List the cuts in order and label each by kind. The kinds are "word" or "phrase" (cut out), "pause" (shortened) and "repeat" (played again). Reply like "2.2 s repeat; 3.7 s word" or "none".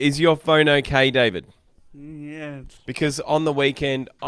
2.8 s pause